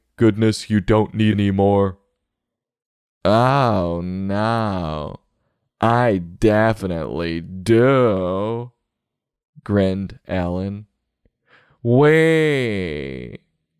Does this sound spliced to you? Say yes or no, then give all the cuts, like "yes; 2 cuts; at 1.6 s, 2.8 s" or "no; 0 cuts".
yes; 1 cut; at 1.3 s